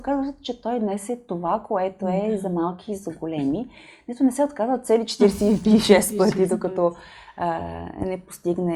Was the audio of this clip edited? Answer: no; 0 cuts

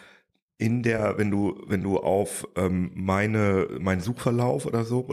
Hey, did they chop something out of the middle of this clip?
no; 0 cuts

